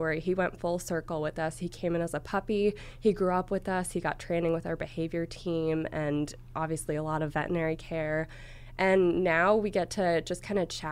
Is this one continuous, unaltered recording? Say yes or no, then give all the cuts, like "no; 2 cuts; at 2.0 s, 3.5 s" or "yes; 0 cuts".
yes; 0 cuts